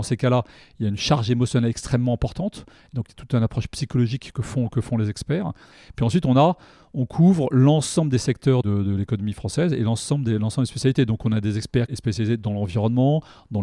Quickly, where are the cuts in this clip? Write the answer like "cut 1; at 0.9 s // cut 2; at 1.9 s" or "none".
none